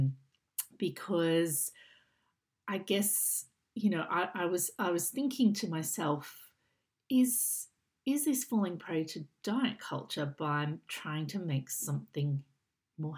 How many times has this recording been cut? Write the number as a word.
zero